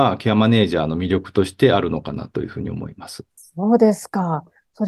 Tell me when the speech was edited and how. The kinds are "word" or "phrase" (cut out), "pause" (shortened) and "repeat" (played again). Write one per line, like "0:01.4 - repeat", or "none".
0:03.3 - pause

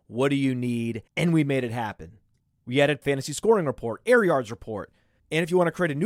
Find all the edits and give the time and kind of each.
0:01.1 - pause
0:02.4 - pause
0:03.0 - phrase

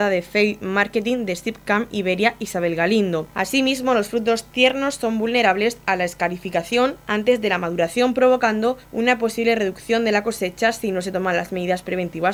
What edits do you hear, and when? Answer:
none

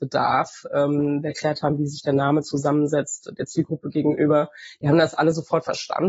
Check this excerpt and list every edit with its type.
0:01.3 - word

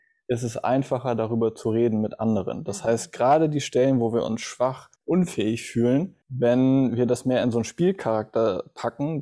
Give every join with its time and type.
0:05.0 - pause
0:06.2 - pause

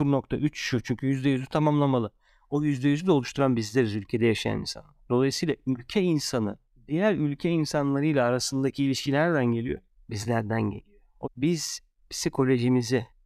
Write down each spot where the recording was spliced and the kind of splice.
0:11.2 - word

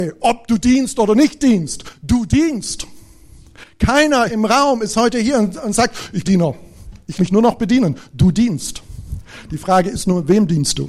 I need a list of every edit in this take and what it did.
0:04.3 - word
0:06.2 - phrase
0:07.2 - word

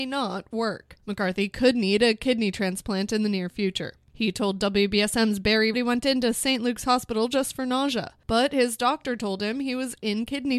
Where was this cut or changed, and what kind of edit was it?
0:01.0 - pause
0:05.7 - phrase

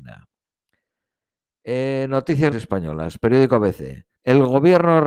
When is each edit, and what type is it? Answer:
0:02.5 - word
0:04.2 - pause

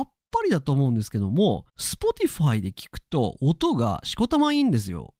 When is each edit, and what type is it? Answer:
0:01.7 - pause

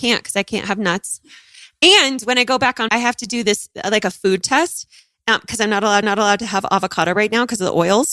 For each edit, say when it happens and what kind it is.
0:02.9 - word
0:06.0 - repeat

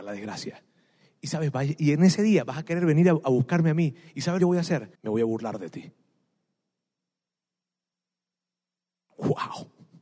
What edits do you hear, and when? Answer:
0:04.4 - phrase
0:04.9 - pause

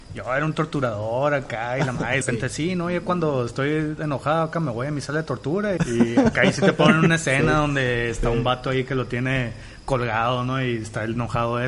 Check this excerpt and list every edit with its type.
0:02.2 - phrase
0:05.8 - word

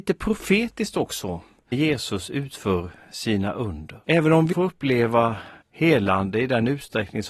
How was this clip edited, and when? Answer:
0:01.7 - word
0:04.0 - pause
0:04.5 - word
0:05.6 - pause

